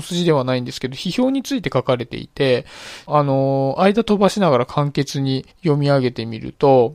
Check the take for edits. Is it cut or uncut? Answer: cut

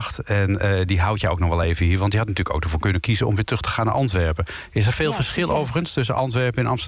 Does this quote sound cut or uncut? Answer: uncut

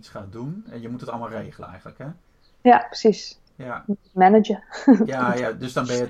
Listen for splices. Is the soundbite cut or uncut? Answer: uncut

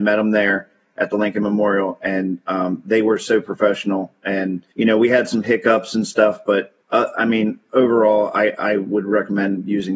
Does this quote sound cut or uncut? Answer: cut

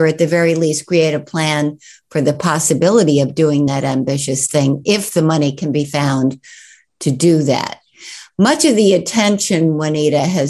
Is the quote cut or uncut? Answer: uncut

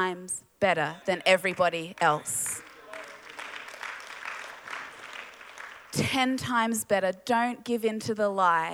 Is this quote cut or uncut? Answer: cut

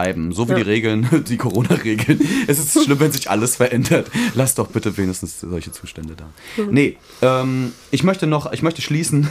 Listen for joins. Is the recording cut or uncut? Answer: uncut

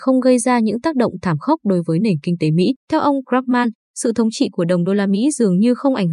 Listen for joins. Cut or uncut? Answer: cut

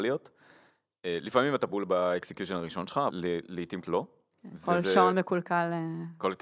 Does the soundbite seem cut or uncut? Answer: cut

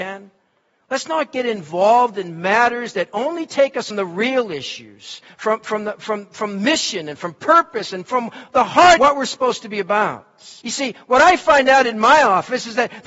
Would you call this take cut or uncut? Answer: cut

